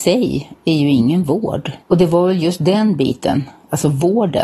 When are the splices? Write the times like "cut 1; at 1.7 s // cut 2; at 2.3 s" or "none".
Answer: cut 1; at 1.8 s